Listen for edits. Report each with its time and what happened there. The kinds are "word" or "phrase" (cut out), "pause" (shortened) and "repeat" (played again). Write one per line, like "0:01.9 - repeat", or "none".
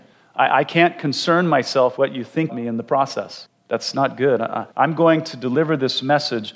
0:02.0 - word
0:02.5 - word
0:04.7 - pause